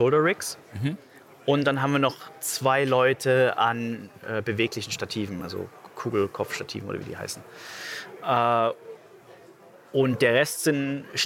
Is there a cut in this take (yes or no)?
no